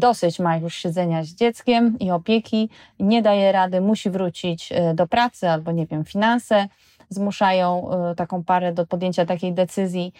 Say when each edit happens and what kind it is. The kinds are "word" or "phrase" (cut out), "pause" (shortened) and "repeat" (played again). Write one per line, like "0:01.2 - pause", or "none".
none